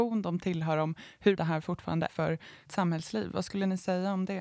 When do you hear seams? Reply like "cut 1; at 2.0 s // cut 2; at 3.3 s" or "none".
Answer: cut 1; at 1.4 s // cut 2; at 2.1 s // cut 3; at 2.7 s